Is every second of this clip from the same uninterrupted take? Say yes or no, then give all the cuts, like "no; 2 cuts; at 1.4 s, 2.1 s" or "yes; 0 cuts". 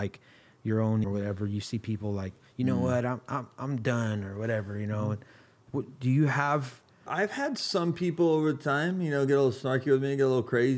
no; 2 cuts; at 1.0 s, 7.1 s